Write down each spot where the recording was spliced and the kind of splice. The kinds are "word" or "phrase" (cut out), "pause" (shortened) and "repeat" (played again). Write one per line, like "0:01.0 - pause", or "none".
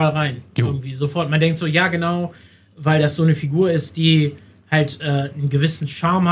none